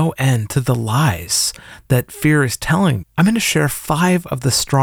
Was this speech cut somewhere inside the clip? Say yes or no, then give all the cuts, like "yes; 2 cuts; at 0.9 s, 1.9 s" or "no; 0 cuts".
yes; 1 cut; at 3.0 s